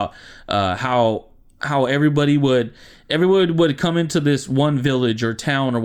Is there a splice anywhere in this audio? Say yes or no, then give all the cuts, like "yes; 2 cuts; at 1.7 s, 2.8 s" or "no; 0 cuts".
no; 0 cuts